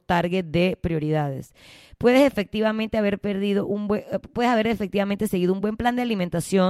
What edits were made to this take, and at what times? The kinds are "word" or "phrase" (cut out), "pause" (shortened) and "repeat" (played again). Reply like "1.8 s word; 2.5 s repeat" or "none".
none